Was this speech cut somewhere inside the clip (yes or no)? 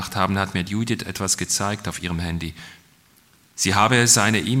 no